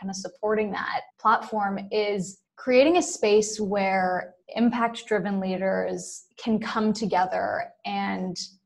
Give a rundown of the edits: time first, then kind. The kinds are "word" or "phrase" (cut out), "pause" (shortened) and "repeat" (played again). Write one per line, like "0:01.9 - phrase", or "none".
0:01.1 - pause
0:02.5 - pause
0:04.4 - pause
0:06.3 - pause